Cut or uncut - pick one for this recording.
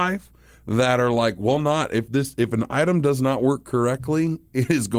uncut